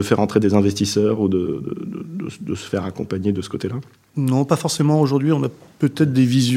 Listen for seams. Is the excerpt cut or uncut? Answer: uncut